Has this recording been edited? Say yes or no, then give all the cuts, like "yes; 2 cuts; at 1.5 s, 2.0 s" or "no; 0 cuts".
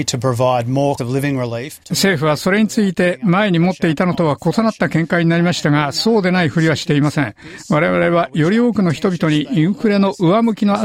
yes; 2 cuts; at 1.0 s, 1.8 s